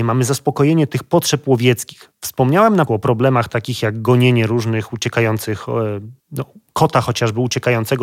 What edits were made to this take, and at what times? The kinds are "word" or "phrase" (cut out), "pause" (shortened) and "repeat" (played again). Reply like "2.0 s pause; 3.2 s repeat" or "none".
2.9 s word; 6.2 s pause